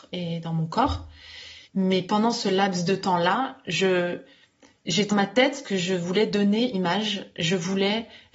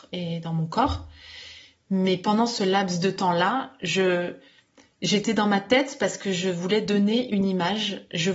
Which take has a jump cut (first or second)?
first